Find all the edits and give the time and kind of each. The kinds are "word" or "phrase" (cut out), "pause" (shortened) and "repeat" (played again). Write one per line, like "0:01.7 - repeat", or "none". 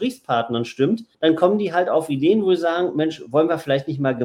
0:01.1 - pause